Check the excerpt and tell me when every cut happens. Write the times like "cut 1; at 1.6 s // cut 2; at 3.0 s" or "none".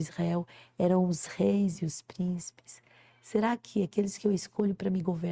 none